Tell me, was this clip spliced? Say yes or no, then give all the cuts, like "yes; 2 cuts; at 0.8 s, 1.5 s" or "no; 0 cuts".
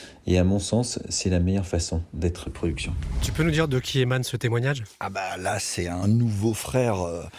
yes; 1 cut; at 2.5 s